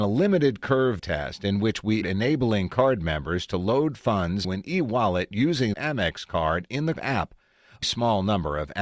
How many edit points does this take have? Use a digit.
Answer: 6